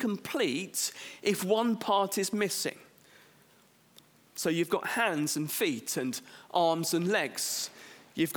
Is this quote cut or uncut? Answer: uncut